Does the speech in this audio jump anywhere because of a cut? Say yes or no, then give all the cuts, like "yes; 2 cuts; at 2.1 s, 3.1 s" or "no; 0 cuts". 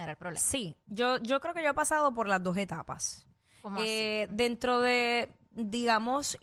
no; 0 cuts